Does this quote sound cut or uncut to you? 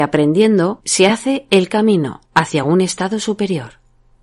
uncut